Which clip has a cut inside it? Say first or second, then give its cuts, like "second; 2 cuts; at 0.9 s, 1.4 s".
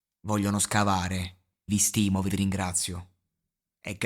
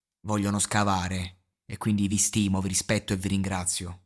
first; 2 cuts; at 1.7 s, 2.3 s